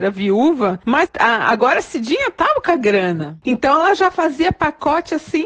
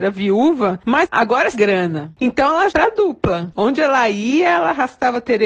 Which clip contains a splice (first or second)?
second